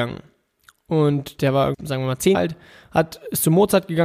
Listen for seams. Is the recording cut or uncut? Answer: cut